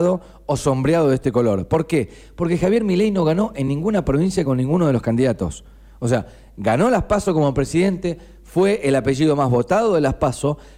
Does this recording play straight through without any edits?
yes; 0 cuts

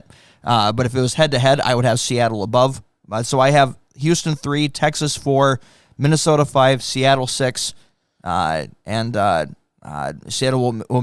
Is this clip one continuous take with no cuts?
yes; 0 cuts

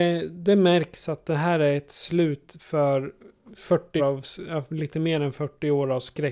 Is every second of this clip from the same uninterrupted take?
no; 1 cut; at 4.0 s

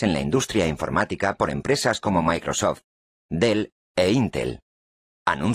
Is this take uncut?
yes; 0 cuts

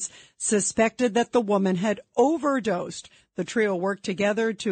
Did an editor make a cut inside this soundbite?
no; 0 cuts

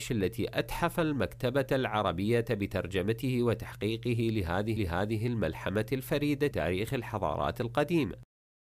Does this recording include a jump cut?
yes; 2 cuts; at 4.8 s, 6.5 s

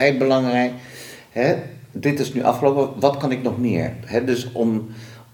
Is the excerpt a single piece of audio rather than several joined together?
yes; 0 cuts

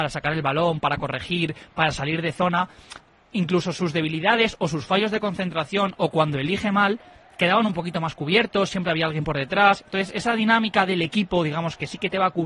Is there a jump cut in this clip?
no; 0 cuts

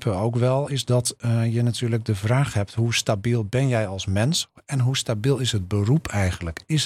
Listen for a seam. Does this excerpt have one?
no; 0 cuts

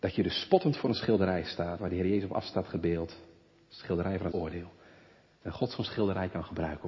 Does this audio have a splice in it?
yes; 2 cuts; at 1.8 s, 4.3 s

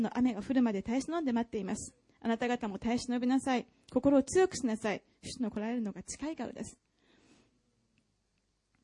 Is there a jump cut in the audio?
no; 0 cuts

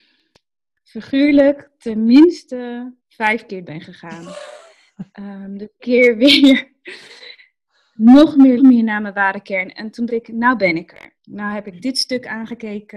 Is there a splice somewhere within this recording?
yes; 6 cuts; at 3.0 s, 3.7 s, 5.8 s, 8.6 s, 10.1 s, 11.2 s

